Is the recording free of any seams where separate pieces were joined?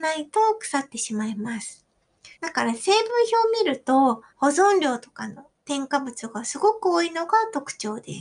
no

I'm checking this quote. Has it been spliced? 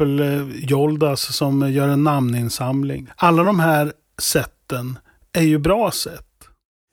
no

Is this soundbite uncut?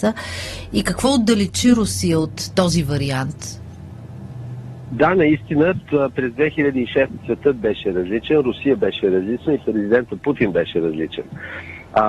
no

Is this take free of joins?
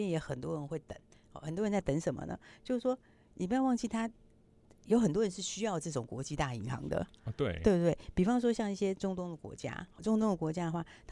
yes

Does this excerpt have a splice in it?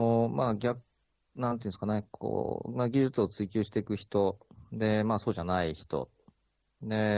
no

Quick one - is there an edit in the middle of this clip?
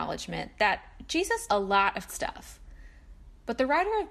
yes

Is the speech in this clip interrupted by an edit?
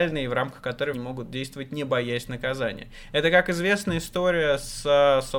yes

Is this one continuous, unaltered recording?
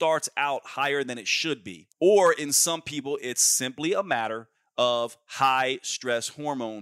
no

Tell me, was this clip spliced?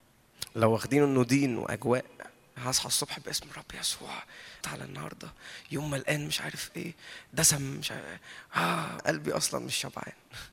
yes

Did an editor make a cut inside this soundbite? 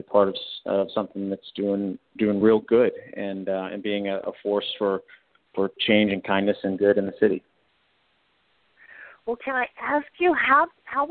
no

